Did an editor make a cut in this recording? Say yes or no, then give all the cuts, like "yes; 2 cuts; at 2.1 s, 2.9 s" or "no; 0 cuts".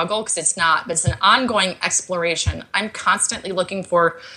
no; 0 cuts